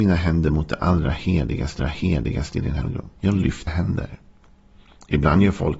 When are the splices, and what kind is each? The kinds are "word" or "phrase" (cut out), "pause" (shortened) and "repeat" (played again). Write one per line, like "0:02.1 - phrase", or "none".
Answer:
0:01.8 - repeat
0:03.2 - pause
0:03.7 - word

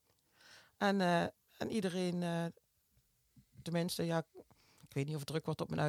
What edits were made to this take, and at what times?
none

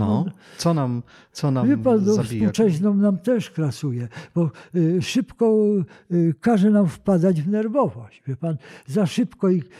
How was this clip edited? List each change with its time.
none

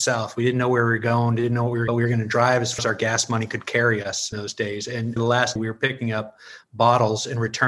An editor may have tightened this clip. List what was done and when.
0:01.9 - phrase
0:02.8 - word
0:04.3 - word
0:05.2 - phrase
0:05.6 - word

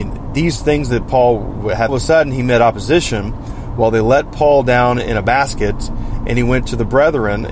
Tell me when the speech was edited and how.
0:01.9 - phrase

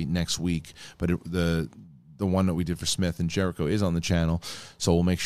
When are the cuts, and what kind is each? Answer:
none

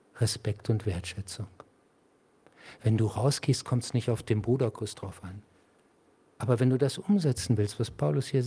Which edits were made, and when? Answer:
none

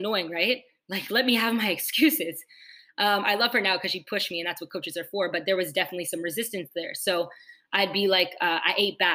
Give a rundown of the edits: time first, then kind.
none

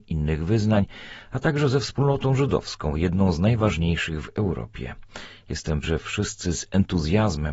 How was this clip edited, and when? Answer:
0:05.8 - word

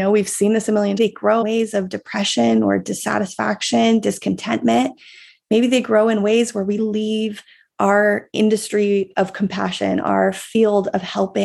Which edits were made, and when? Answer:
0:01.0 - phrase
0:01.4 - word
0:06.8 - word

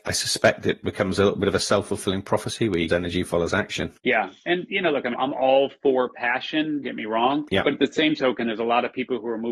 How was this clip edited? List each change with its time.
0:02.9 - phrase
0:04.0 - pause
0:05.1 - word
0:06.8 - word

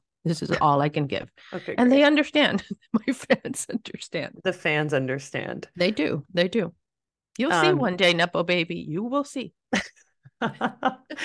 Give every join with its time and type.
none

